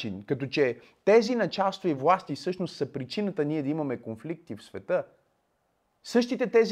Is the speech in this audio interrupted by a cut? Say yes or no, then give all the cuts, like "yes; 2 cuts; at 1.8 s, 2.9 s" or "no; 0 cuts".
no; 0 cuts